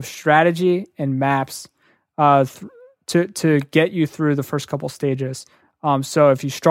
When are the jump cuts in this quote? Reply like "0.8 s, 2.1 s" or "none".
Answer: none